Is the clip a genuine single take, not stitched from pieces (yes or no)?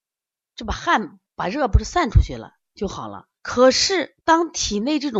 no